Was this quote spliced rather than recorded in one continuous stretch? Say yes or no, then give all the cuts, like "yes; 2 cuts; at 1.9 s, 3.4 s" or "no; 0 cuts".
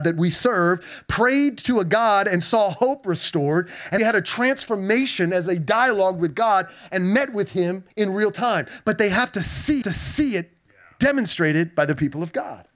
yes; 3 cuts; at 4.0 s, 7.9 s, 9.8 s